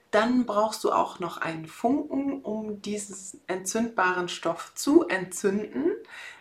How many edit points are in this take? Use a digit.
0